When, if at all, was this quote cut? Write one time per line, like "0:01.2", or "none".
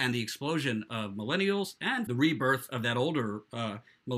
0:02.1